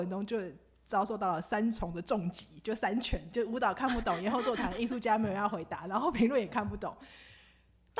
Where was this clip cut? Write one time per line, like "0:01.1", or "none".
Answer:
none